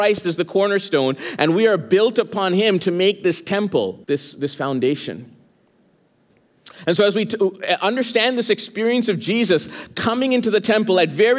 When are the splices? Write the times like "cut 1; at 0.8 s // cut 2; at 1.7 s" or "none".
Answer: cut 1; at 4.0 s